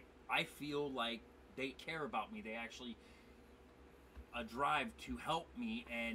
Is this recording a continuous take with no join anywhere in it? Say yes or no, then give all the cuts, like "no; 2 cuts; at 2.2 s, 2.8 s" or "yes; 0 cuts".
no; 2 cuts; at 1.7 s, 4.3 s